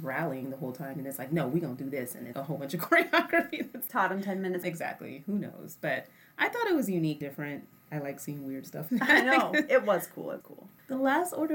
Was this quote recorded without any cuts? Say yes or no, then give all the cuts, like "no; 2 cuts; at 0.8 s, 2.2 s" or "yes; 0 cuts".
no; 7 cuts; at 2.3 s, 3.9 s, 4.6 s, 7.2 s, 7.9 s, 8.9 s, 10.4 s